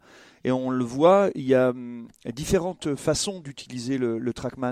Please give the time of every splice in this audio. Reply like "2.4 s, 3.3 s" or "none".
none